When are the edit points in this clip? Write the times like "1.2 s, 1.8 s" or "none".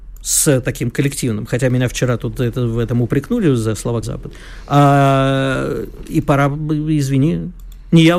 4.0 s